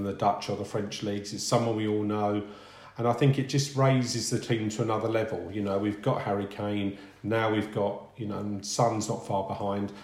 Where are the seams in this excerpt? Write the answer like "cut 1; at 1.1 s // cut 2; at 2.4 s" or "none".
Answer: none